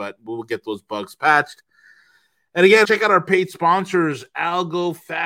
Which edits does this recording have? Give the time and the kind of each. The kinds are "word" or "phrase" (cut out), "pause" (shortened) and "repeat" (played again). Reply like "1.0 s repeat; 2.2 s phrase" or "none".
2.8 s word